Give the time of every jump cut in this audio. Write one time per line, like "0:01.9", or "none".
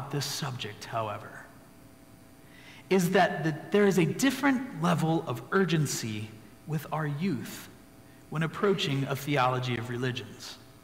none